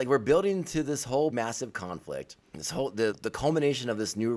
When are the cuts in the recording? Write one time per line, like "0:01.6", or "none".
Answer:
0:01.3
0:02.4
0:03.1